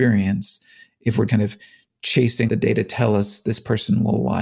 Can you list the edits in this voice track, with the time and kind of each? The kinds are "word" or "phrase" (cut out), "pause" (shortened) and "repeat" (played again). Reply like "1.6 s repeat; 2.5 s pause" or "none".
1.3 s word; 2.5 s word